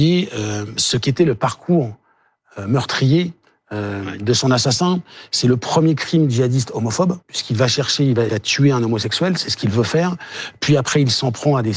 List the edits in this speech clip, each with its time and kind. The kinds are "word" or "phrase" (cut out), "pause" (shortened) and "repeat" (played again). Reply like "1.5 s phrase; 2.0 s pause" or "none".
7.2 s pause; 8.3 s word

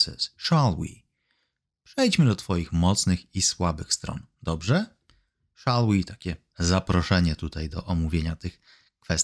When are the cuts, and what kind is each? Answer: none

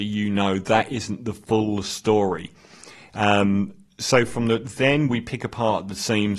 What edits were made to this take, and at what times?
none

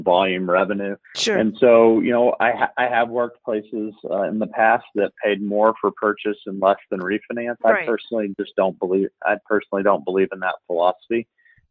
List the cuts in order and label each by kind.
1.0 s pause

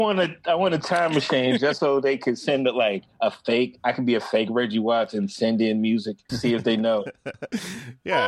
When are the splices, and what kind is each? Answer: 6.3 s word

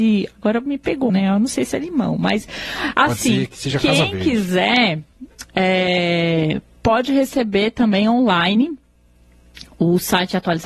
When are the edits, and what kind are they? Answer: 1.1 s word

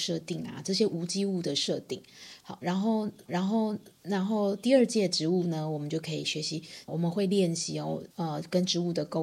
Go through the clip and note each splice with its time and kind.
3.3 s repeat; 6.9 s word; 8.1 s pause

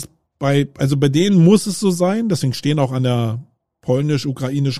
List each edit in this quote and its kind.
3.6 s pause

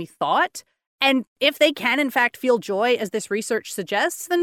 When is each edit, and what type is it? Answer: none

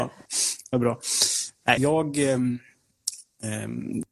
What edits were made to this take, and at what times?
1.8 s word

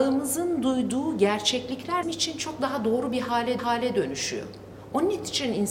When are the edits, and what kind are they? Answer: 2.0 s word; 3.6 s repeat

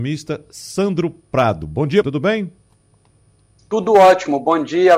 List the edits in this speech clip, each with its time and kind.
2.0 s word

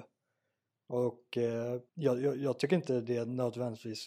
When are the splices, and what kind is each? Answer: 1.9 s pause

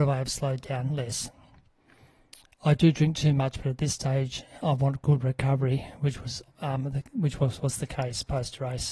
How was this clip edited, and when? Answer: none

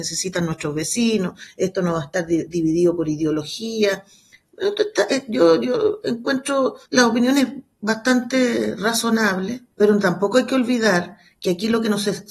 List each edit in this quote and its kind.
6.9 s pause; 9.7 s pause

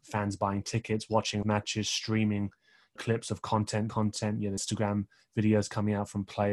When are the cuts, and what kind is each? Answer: 1.4 s word; 3.0 s phrase; 3.9 s word; 4.6 s word

